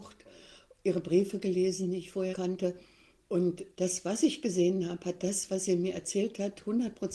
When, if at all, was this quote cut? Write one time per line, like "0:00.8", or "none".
0:02.3